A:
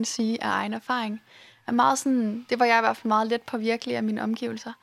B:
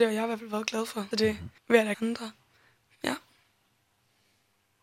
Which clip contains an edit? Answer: B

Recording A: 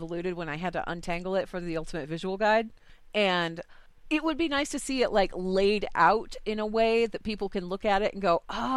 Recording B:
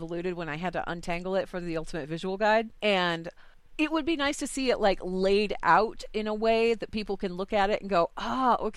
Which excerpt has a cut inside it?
B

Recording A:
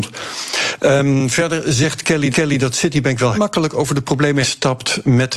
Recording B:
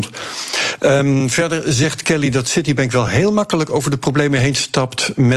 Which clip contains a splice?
A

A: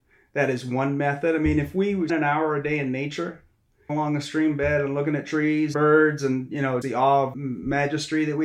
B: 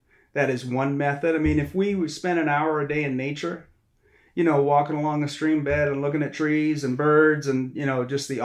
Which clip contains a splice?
A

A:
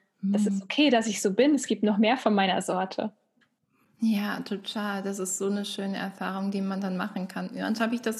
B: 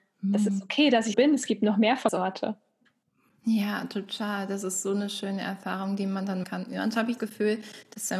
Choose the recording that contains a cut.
B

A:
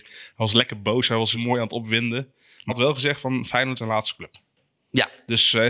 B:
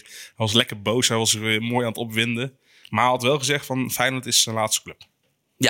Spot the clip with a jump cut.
A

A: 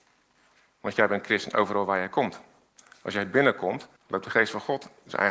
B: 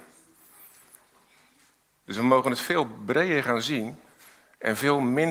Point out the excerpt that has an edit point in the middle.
A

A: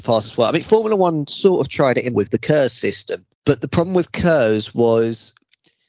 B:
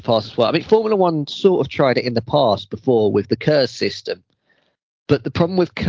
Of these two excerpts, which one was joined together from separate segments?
A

